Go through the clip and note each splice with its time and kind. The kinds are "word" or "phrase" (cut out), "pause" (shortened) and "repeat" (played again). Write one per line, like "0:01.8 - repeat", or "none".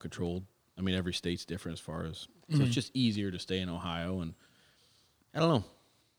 none